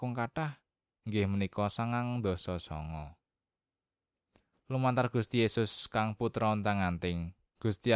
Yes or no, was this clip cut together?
no